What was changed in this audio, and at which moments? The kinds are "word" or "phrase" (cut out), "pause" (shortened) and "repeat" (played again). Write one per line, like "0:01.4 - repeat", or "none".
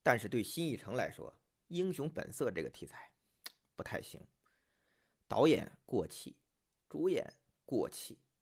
none